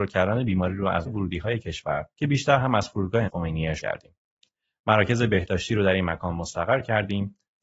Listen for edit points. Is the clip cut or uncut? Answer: cut